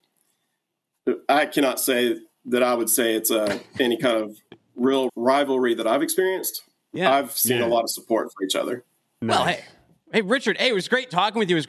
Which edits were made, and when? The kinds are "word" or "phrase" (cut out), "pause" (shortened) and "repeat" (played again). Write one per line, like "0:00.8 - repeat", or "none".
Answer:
0:05.1 - word